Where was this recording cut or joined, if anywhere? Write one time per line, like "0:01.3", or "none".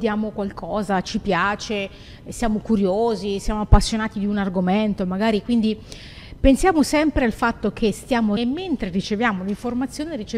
0:08.4

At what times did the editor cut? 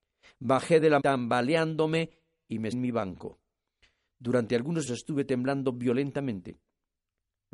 0:01.0
0:02.7
0:04.9

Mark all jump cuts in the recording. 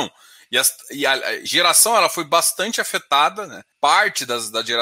0:01.5
0:03.7

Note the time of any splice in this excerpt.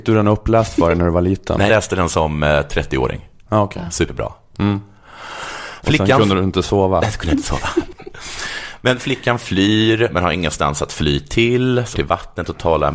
0:01.7
0:11.9

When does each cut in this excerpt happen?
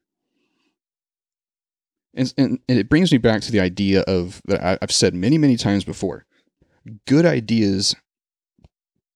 none

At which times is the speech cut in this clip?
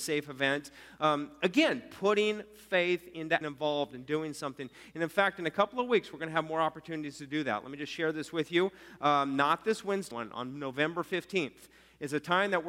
0:03.4
0:10.1

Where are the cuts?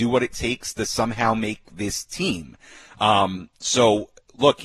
none

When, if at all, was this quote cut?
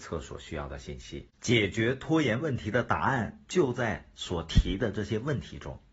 0:01.3

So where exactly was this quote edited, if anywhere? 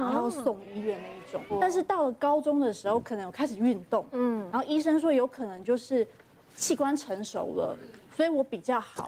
none

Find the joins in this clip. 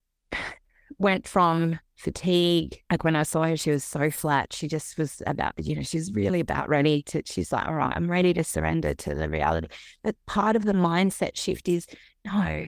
0:02.8

